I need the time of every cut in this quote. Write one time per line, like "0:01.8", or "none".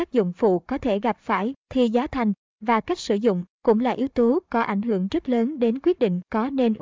0:03.5